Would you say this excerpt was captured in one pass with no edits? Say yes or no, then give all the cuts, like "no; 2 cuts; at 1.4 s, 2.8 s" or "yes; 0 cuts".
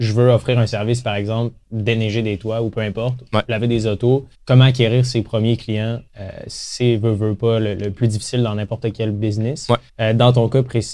no; 3 cuts; at 4.3 s, 6.1 s, 9.9 s